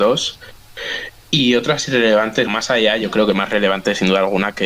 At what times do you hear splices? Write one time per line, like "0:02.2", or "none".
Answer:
0:02.5